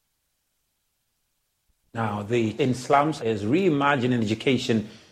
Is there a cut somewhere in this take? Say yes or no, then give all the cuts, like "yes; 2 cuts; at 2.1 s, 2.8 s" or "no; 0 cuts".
yes; 2 cuts; at 2.6 s, 3.2 s